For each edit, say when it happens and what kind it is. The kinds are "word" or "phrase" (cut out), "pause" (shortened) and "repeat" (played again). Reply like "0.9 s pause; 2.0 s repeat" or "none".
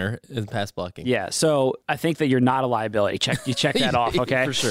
1.8 s pause